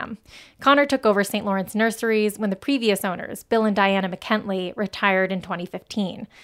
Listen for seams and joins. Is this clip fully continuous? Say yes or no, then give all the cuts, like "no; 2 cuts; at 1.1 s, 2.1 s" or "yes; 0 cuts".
yes; 0 cuts